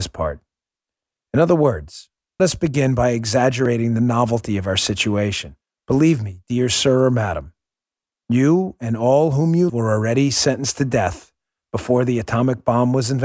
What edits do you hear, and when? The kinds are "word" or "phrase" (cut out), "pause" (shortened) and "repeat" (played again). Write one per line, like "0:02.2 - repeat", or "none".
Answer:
0:02.4 - phrase
0:05.6 - pause
0:09.7 - word